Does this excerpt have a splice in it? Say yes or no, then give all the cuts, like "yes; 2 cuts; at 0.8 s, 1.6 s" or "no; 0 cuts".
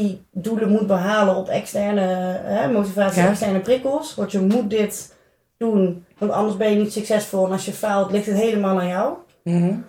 no; 0 cuts